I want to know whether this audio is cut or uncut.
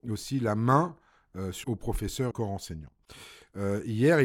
cut